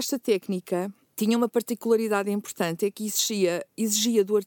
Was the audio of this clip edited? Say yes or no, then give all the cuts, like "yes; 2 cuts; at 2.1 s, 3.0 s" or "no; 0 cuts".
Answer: no; 0 cuts